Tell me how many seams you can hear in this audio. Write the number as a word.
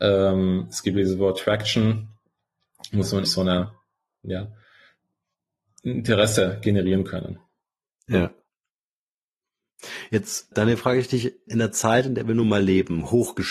three